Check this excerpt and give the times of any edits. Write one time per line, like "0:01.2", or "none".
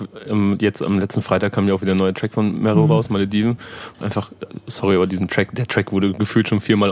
0:04.0